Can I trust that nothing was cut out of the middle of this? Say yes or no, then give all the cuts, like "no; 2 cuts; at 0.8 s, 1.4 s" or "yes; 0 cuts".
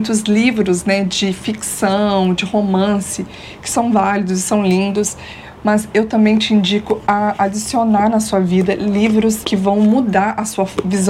yes; 0 cuts